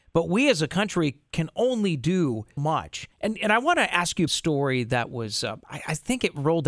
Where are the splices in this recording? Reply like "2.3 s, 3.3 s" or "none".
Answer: 2.6 s, 3.1 s, 4.3 s